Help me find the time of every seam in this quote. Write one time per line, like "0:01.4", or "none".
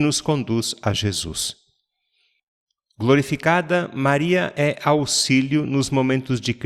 none